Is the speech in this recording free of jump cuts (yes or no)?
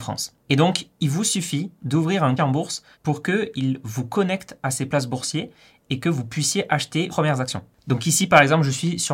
no